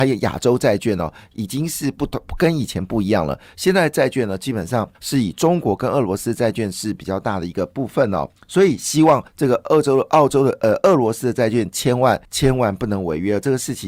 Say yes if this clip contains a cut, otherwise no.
yes